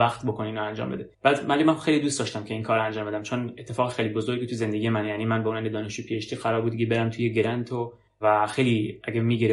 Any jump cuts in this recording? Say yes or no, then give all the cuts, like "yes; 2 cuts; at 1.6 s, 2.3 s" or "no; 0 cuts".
yes; 2 cuts; at 1.1 s, 8.1 s